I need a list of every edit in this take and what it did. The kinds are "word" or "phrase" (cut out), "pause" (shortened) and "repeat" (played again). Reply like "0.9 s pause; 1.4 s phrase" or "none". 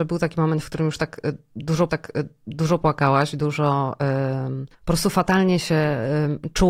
1.9 s repeat; 4.7 s pause